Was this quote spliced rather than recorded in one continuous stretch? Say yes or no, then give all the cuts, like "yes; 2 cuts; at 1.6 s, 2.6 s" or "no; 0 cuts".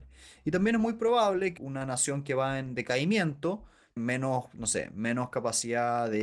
yes; 2 cuts; at 1.6 s, 4.0 s